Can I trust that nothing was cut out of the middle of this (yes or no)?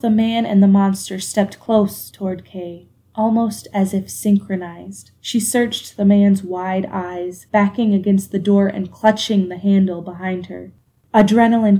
no